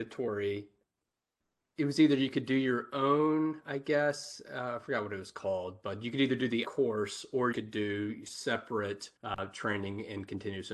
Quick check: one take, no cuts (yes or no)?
no